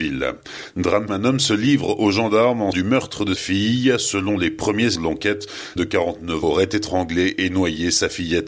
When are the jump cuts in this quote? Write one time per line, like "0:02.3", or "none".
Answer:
0:01.1
0:02.7
0:03.4
0:05.0
0:05.8
0:06.4